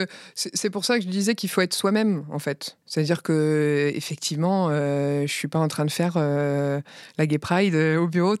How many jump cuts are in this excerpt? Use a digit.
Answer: 1